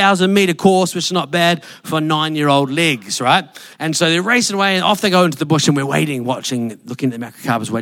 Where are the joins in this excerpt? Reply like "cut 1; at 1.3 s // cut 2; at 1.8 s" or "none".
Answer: cut 1; at 3.7 s